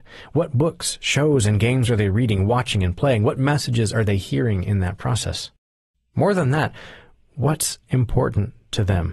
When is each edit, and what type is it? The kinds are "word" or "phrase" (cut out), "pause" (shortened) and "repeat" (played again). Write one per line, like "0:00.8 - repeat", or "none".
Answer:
none